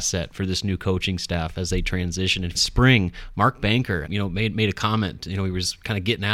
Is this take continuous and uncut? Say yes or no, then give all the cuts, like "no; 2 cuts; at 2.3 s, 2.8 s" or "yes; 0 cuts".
no; 2 cuts; at 2.5 s, 4.1 s